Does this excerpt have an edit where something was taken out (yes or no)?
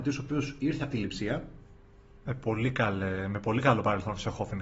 no